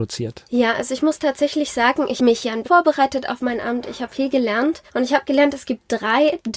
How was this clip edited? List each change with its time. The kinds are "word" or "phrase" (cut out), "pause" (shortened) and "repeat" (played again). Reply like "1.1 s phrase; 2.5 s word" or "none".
2.2 s word; 2.6 s word; 4.9 s pause